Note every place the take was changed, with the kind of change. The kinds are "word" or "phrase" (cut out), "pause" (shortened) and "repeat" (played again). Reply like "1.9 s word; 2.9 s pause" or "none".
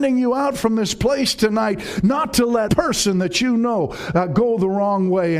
2.7 s word